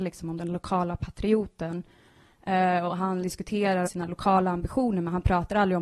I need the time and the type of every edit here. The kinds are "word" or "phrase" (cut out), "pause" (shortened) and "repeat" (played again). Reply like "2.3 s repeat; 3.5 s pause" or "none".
3.2 s word; 3.9 s phrase